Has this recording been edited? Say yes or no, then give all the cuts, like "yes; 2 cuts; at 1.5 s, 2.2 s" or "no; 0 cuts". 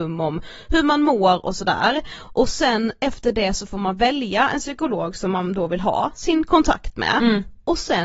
no; 0 cuts